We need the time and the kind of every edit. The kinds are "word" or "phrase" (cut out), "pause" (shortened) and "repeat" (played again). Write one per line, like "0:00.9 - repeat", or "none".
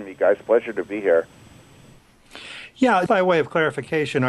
0:03.1 - word